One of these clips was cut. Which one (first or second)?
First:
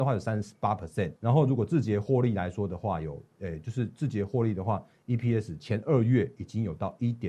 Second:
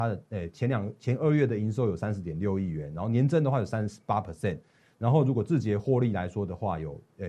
first